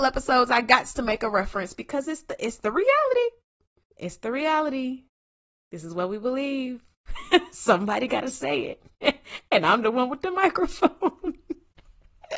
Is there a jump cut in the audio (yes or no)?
no